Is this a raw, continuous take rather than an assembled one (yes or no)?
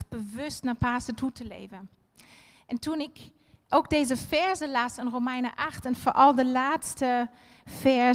yes